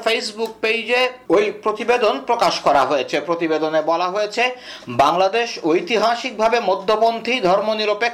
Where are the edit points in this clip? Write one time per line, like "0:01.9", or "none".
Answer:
none